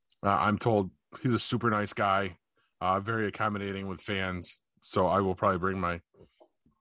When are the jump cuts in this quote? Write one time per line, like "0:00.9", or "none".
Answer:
0:01.4